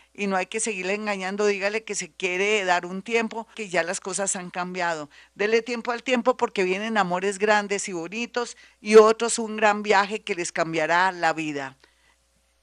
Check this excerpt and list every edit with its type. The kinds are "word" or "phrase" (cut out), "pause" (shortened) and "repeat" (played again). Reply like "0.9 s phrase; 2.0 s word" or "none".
3.5 s phrase